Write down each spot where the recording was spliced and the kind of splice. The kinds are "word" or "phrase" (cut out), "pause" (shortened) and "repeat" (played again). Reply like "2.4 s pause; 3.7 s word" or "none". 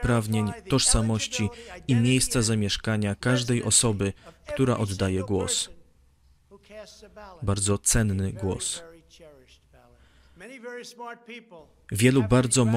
none